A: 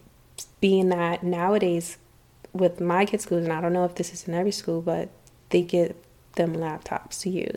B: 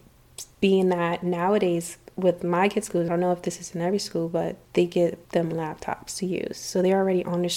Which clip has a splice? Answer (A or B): B